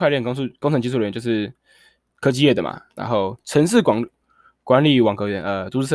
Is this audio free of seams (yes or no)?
yes